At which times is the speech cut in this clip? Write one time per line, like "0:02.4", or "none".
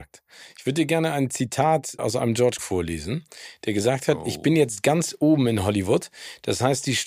0:02.0
0:02.6